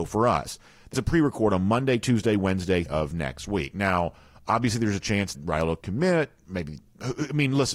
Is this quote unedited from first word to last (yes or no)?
no